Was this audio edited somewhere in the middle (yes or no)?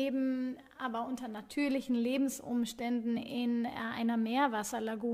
no